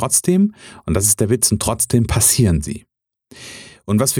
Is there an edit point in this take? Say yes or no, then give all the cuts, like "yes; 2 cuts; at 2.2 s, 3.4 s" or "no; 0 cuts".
no; 0 cuts